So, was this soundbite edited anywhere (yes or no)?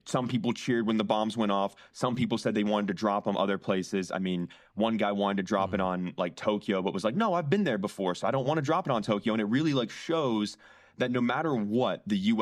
no